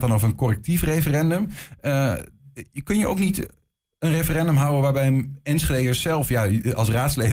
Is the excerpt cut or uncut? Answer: uncut